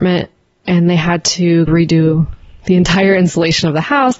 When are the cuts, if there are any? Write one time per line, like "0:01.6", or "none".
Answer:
0:01.7